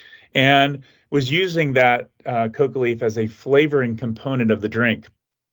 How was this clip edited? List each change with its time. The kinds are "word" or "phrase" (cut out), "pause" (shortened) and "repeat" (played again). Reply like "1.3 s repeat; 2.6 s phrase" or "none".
none